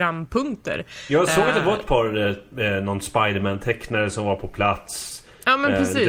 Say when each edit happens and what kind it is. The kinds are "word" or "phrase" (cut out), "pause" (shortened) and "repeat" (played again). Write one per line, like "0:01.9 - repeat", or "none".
0:02.5 - word